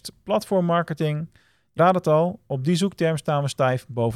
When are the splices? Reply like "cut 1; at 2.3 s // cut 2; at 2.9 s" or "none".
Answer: cut 1; at 1.8 s